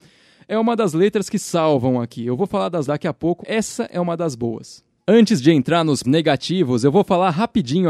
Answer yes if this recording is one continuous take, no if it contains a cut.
no